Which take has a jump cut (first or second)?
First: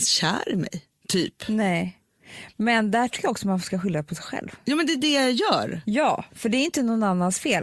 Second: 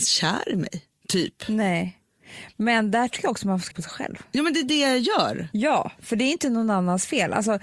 second